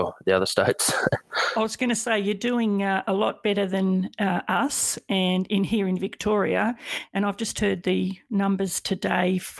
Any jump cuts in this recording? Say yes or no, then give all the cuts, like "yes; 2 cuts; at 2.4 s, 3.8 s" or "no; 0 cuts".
no; 0 cuts